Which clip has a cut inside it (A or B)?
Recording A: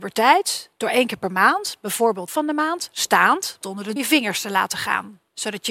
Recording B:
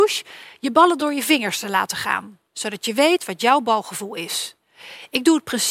A